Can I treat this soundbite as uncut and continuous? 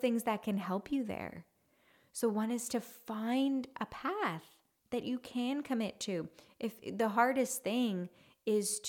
yes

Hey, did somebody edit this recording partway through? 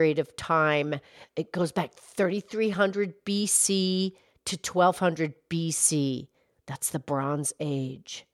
no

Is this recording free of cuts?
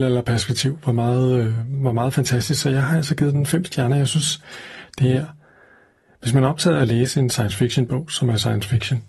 yes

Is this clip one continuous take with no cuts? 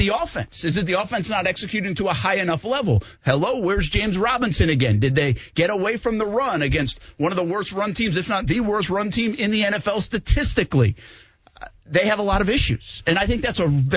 yes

